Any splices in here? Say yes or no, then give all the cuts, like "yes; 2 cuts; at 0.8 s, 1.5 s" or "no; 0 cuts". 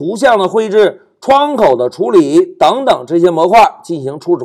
no; 0 cuts